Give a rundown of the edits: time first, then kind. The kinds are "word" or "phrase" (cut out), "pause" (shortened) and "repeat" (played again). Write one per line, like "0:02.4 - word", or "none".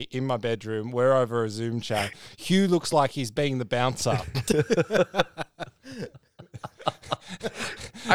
none

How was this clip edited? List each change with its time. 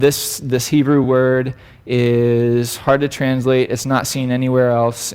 none

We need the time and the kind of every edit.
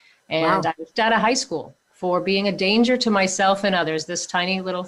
0:00.9 - word

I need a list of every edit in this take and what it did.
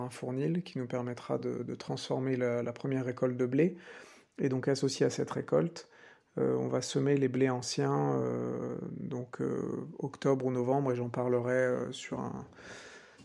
none

